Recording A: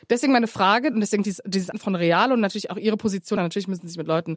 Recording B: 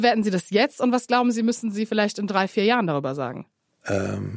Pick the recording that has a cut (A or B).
A